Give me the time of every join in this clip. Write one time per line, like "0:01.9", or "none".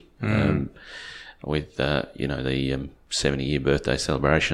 none